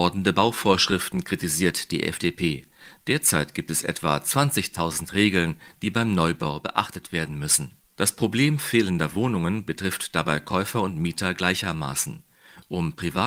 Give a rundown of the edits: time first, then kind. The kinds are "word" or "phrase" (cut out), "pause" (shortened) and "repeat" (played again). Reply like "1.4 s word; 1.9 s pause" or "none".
7.8 s pause